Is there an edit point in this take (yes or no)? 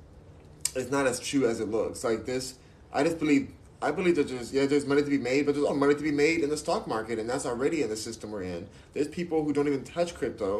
yes